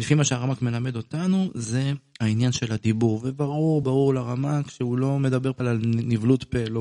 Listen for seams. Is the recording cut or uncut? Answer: cut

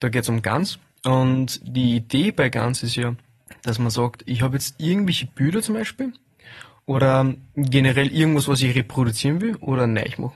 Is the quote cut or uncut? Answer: uncut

